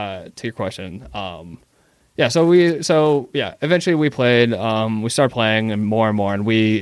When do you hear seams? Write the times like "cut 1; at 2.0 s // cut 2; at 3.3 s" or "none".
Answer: none